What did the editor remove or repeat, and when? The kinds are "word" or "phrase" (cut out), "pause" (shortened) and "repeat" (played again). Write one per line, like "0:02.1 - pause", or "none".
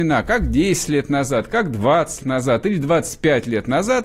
0:02.2 - word